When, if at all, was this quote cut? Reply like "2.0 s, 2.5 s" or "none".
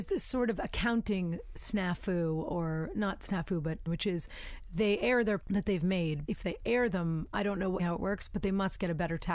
3.9 s, 5.4 s, 6.3 s, 7.8 s